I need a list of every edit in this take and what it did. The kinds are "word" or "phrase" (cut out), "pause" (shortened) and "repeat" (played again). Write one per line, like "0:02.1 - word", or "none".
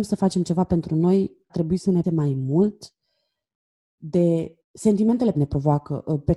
0:01.5 - word
0:02.0 - word
0:04.6 - pause
0:05.3 - word